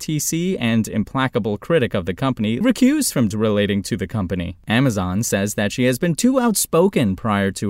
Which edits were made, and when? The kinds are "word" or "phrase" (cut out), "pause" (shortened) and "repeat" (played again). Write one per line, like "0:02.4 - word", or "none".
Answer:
0:02.6 - phrase
0:03.3 - word